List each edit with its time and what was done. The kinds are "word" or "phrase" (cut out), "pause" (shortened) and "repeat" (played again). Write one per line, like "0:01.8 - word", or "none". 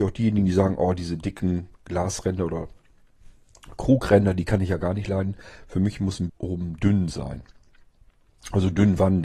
0:06.3 - word